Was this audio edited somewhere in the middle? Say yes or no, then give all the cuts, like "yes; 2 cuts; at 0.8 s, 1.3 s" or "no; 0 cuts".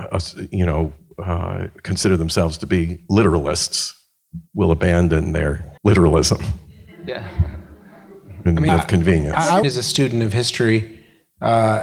yes; 4 cuts; at 4.5 s, 5.8 s, 8.7 s, 9.6 s